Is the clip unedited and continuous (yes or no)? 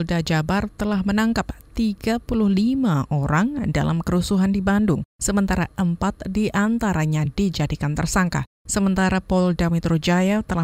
yes